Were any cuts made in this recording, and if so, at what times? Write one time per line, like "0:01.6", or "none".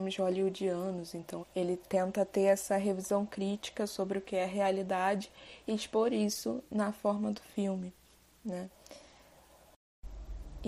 0:01.4